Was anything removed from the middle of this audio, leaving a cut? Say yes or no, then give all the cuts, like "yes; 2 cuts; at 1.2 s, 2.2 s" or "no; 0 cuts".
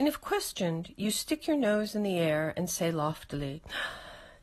no; 0 cuts